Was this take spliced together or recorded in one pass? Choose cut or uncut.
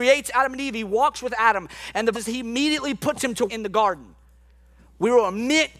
cut